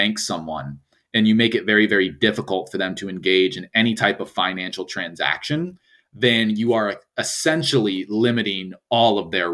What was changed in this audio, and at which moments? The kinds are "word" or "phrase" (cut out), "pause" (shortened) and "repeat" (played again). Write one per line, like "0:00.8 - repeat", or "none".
none